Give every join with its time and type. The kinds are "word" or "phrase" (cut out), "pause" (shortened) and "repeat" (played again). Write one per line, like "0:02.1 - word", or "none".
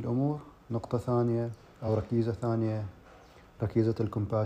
none